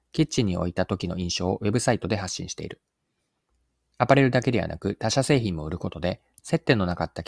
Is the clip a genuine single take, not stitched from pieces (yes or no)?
yes